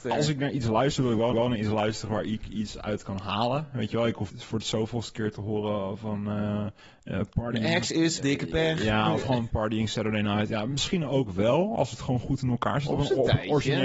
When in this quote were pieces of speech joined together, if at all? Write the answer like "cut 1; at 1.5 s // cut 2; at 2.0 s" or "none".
cut 1; at 1.3 s // cut 2; at 4.3 s // cut 3; at 6.8 s // cut 4; at 8.2 s // cut 5; at 9.5 s